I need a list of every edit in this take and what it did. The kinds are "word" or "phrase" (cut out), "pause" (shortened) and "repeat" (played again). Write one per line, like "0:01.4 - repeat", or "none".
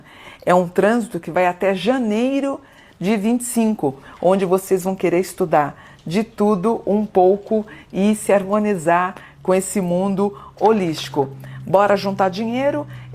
none